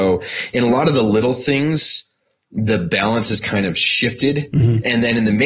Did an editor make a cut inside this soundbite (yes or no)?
no